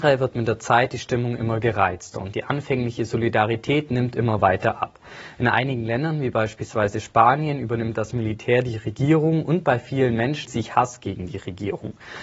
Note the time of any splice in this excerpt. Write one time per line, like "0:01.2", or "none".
0:10.5